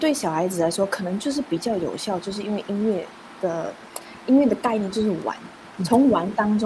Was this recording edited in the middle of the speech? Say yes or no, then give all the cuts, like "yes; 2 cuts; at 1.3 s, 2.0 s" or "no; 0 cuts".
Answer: yes; 1 cut; at 5.8 s